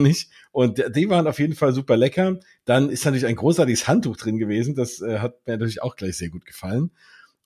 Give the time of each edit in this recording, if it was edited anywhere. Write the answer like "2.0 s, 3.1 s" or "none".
none